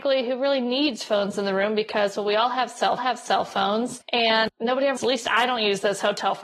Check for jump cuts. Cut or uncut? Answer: cut